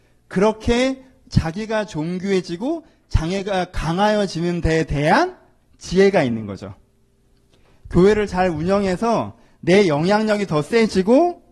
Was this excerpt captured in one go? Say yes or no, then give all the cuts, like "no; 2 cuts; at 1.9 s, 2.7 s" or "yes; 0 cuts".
yes; 0 cuts